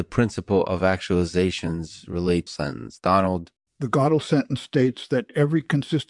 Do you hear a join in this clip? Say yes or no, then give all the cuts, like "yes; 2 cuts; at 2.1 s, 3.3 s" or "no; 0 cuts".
yes; 2 cuts; at 2.5 s, 3.6 s